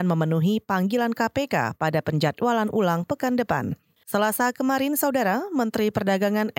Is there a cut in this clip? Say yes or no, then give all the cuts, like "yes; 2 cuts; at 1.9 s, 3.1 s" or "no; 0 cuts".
no; 0 cuts